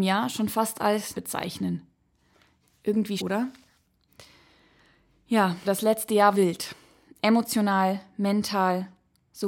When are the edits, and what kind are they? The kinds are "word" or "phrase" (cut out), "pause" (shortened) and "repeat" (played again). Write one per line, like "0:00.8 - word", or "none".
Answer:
0:01.1 - word
0:03.2 - word
0:05.6 - word
0:06.3 - word

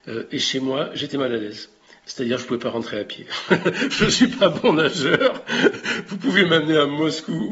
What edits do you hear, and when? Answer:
none

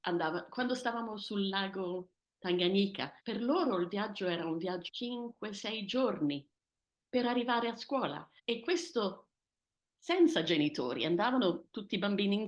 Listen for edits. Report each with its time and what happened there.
0:03.2 - pause
0:04.9 - word
0:08.4 - pause
0:09.6 - pause

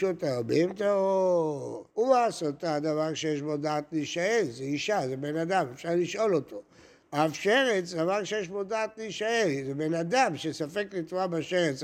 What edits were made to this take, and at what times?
0:01.9 - pause

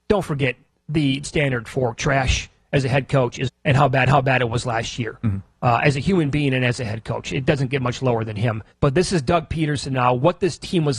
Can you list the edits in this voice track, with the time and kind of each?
0:01.2 - word
0:03.5 - phrase
0:04.1 - repeat
0:08.7 - pause

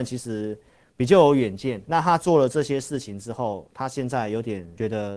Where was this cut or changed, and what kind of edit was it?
0:01.9 - word

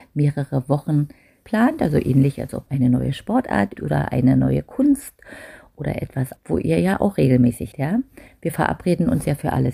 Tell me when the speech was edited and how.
0:01.4 - word
0:02.7 - word
0:03.8 - word
0:06.4 - word
0:07.7 - word

